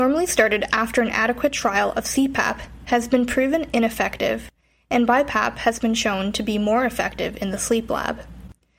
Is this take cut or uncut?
uncut